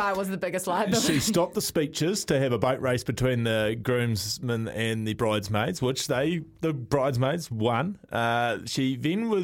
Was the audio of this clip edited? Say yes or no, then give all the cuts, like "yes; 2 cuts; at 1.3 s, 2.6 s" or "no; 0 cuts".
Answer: no; 0 cuts